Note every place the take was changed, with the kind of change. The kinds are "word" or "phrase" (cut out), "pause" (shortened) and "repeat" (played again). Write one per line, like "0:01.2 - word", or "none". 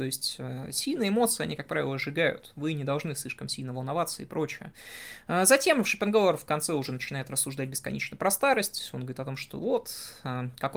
none